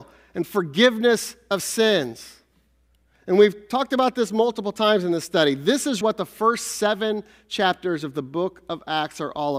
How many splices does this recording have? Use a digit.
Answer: 1